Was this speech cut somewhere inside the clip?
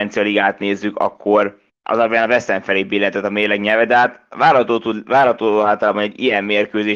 yes; 1 cut; at 1.7 s

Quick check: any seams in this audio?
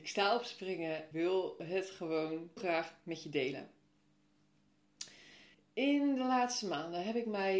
yes; 3 cuts; at 1.1 s, 2.6 s, 5.5 s

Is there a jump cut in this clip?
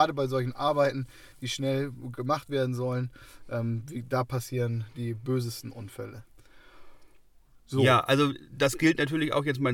no; 0 cuts

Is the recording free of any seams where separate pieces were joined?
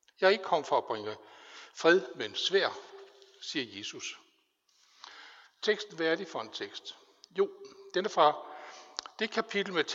yes; 0 cuts

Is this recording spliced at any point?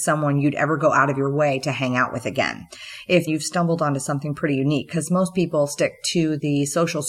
yes; 1 cut; at 3.3 s

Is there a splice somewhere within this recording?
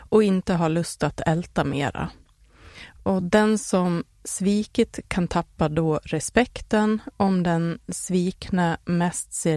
no; 0 cuts

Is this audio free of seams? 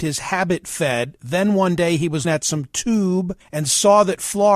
no; 2 cuts; at 2.2 s, 3.4 s

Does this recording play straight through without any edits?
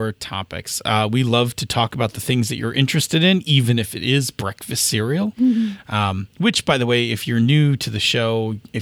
no; 1 cut; at 6.3 s

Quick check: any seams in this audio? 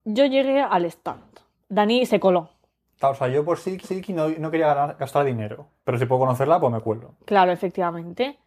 yes; 1 cut; at 3.8 s

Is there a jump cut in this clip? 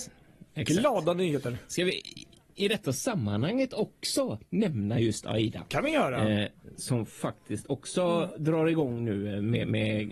no; 0 cuts

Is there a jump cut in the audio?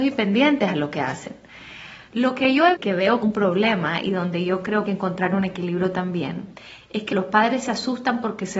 yes; 4 cuts; at 2.7 s, 3.2 s, 4.9 s, 7.1 s

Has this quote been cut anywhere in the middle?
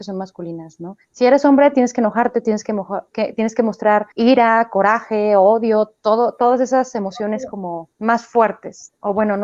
yes; 3 cuts; at 1.0 s, 4.1 s, 7.9 s

